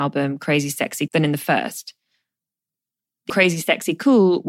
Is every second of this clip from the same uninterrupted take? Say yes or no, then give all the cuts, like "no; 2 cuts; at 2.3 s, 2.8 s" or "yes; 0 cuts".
no; 2 cuts; at 1.1 s, 3.3 s